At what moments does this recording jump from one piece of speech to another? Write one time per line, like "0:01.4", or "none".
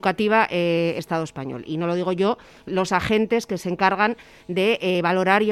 0:01.0
0:02.7